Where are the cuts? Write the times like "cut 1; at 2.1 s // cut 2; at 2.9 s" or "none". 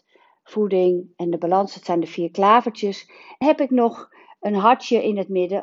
cut 1; at 3.4 s